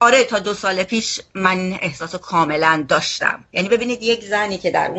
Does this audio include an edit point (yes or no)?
no